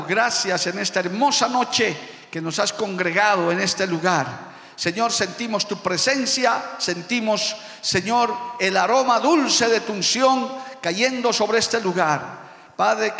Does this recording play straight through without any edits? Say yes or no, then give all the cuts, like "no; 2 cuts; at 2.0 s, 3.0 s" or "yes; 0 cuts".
yes; 0 cuts